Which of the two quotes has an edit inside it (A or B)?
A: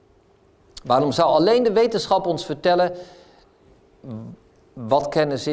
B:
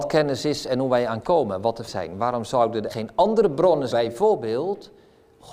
B